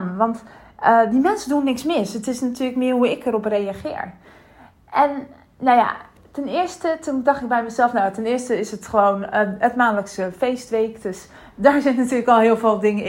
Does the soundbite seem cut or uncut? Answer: uncut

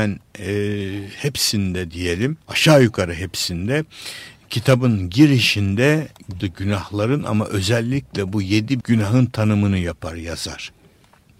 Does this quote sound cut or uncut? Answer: cut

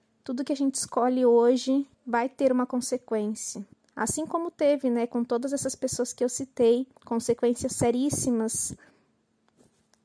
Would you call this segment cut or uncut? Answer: cut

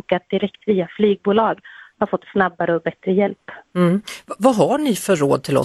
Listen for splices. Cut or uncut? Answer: uncut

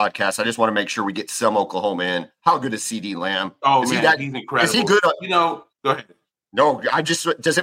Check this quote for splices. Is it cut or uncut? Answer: cut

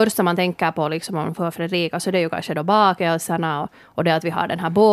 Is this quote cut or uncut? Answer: cut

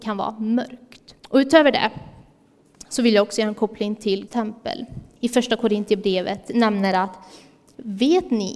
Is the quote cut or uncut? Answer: cut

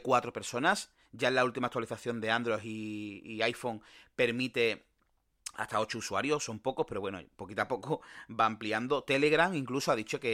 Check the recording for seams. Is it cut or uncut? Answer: uncut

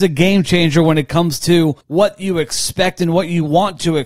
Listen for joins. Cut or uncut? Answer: cut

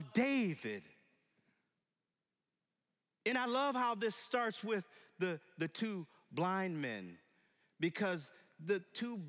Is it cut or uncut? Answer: uncut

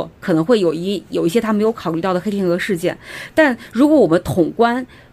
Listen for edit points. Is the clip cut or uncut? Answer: uncut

